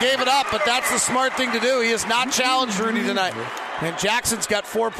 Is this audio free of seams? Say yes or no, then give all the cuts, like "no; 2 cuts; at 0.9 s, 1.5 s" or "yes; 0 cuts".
yes; 0 cuts